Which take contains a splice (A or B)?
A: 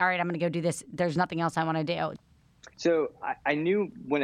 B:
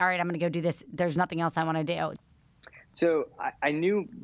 A